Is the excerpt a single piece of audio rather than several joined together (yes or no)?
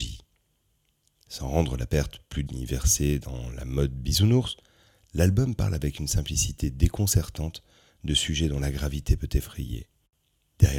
no